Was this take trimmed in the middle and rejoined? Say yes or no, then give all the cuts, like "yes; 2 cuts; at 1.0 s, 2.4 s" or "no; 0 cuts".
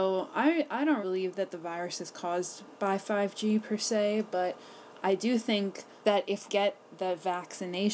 yes; 3 cuts; at 1.0 s, 6.0 s, 6.5 s